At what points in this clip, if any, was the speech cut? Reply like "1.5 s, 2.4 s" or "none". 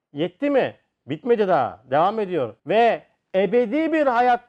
2.6 s

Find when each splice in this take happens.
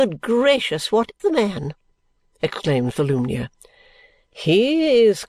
1.2 s

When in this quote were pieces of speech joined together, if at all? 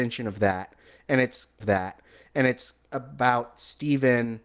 1.6 s

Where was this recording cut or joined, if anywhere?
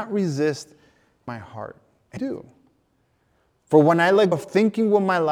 1.3 s, 2.2 s, 4.3 s

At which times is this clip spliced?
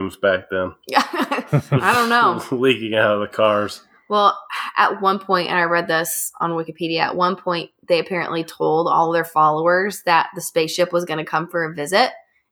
none

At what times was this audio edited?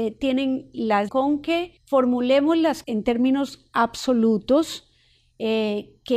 1.1 s, 1.8 s, 2.8 s

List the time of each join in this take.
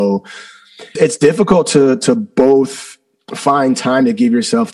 1.0 s

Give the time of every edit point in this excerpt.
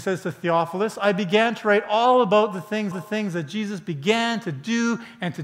2.9 s

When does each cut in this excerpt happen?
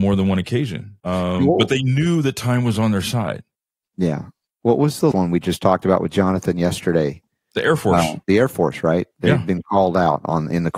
1.0 s, 5.1 s, 8.2 s

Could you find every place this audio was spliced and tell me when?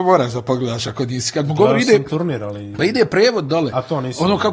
none

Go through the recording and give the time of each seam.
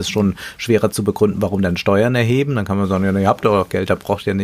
none

